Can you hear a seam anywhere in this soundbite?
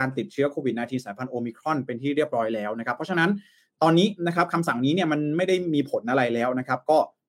no; 0 cuts

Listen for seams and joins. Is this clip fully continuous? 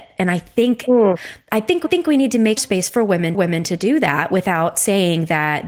no; 3 cuts; at 1.9 s, 2.6 s, 3.3 s

